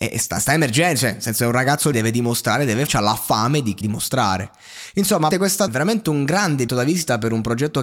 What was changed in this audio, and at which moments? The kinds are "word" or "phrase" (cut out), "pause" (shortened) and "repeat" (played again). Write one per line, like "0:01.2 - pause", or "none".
0:01.9 - word
0:02.9 - word
0:03.8 - word
0:05.3 - word
0:05.7 - phrase
0:06.7 - word